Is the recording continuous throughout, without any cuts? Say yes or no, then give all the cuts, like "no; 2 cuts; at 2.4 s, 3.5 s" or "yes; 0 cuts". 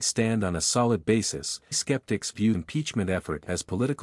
no; 2 cuts; at 1.7 s, 2.5 s